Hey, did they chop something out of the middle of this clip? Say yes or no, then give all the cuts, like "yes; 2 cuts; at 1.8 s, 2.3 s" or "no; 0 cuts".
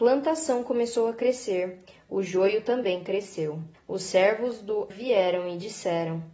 yes; 2 cuts; at 3.7 s, 4.9 s